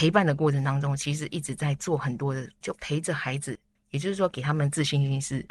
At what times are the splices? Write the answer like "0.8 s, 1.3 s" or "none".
none